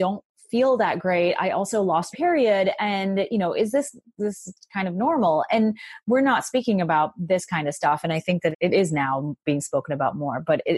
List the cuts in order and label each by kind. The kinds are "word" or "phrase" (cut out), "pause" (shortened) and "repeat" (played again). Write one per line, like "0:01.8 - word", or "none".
0:02.1 - word
0:08.5 - word